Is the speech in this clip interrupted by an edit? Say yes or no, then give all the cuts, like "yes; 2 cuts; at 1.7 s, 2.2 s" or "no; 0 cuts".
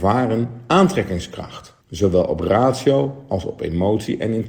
yes; 1 cut; at 1.8 s